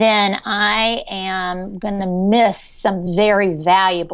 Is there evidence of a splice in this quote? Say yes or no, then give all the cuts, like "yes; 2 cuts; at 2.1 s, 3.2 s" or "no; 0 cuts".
no; 0 cuts